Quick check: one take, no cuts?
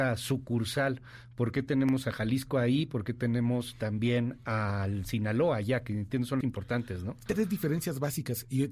no; 2 cuts; at 6.4 s, 7.3 s

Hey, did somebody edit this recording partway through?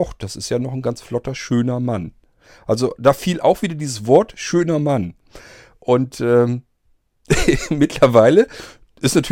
no; 0 cuts

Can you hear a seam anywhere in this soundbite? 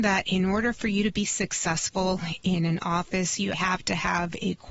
yes; 1 cut; at 3.5 s

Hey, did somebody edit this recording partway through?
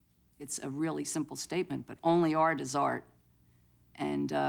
no; 0 cuts

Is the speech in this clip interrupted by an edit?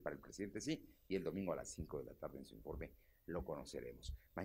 no; 0 cuts

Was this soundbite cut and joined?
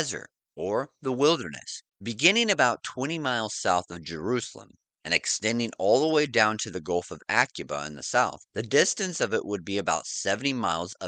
yes; 2 cuts; at 1.9 s, 8.5 s

